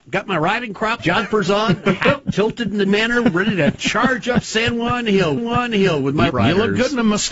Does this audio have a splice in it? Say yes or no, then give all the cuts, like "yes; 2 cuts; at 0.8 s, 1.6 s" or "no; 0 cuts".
yes; 4 cuts; at 1.0 s, 2.8 s, 5.4 s, 6.3 s